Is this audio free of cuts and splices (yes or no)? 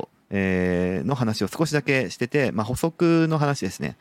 yes